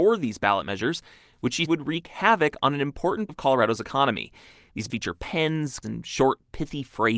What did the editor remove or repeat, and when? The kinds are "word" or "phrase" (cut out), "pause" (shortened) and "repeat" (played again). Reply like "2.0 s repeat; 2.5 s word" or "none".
1.7 s word; 3.3 s word; 4.9 s word; 5.8 s word